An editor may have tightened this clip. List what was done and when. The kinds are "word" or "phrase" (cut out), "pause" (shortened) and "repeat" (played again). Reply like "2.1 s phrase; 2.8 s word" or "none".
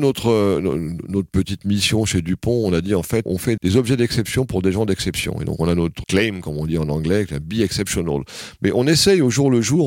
3.3 s word; 3.6 s word; 6.0 s word